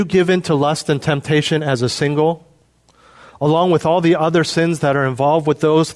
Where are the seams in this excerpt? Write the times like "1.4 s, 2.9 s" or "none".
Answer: none